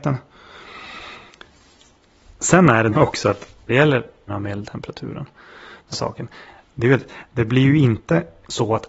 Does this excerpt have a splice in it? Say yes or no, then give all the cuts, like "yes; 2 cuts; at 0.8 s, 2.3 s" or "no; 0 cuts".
yes; 4 cuts; at 2.9 s, 3.7 s, 4.3 s, 5.9 s